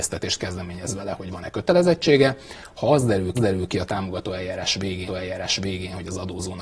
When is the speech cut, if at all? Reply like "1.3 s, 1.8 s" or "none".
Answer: 3.3 s, 5.1 s